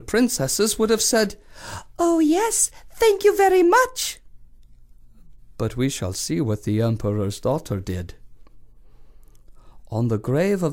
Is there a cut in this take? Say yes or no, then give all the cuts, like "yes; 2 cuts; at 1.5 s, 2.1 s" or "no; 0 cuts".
no; 0 cuts